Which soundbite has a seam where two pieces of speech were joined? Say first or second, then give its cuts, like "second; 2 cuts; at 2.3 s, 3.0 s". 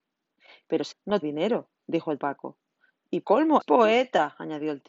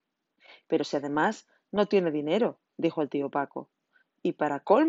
first; 5 cuts; at 0.9 s, 1.2 s, 2.2 s, 3.2 s, 3.6 s